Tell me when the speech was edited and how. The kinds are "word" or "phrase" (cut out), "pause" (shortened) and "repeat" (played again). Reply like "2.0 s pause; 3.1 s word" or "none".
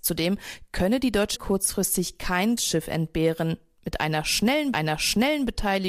1.3 s word; 2.6 s word; 4.7 s repeat

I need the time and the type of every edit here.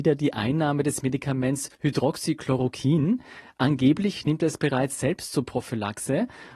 1.7 s pause

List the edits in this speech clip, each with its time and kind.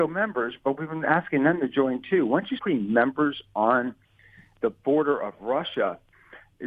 2.6 s word

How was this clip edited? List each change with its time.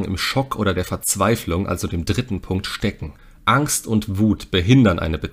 3.2 s pause

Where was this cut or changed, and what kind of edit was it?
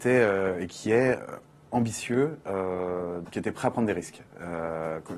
3.2 s word

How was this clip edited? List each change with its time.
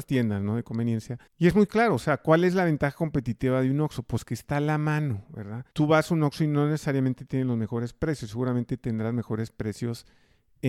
1.3 s pause; 5.7 s pause

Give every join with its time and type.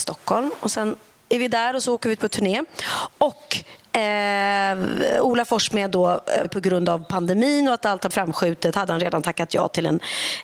6.4 s word; 8.1 s word

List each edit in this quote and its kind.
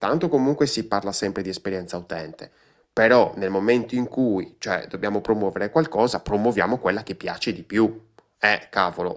none

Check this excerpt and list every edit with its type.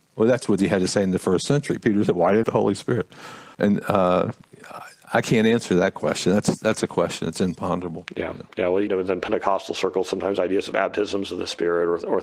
2.4 s phrase; 3.5 s pause; 8.9 s phrase; 10.7 s word

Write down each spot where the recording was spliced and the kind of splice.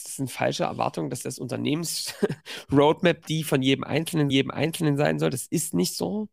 1.2 s word; 4.3 s repeat

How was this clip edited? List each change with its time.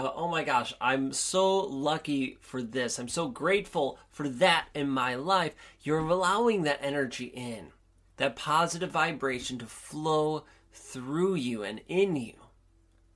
none

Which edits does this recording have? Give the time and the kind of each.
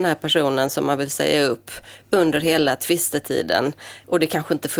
none

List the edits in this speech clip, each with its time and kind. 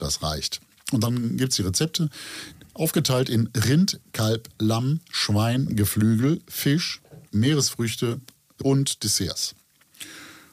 7.3 s pause

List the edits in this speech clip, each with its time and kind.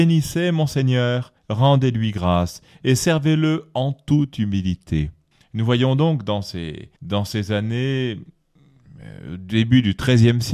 1.4 s pause; 5.3 s pause; 7.0 s pause

